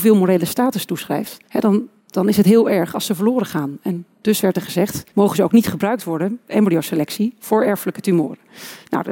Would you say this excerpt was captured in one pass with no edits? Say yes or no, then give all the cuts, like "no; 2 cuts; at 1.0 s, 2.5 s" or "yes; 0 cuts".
no; 2 cuts; at 1.4 s, 5.1 s